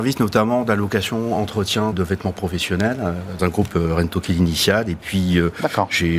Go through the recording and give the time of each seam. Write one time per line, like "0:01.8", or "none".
0:01.9
0:03.4